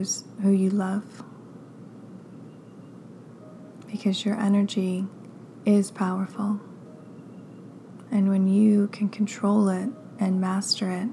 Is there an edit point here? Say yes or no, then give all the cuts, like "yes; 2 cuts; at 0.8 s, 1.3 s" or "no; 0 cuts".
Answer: no; 0 cuts